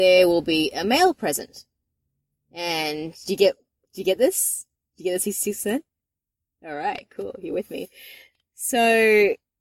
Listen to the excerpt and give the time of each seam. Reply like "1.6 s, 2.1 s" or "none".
none